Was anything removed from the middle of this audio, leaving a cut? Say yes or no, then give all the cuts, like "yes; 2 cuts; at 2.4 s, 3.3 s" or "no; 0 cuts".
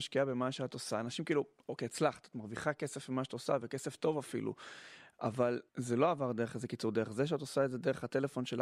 yes; 1 cut; at 5.7 s